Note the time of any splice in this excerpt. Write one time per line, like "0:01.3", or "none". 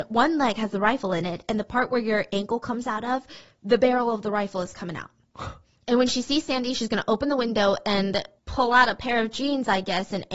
none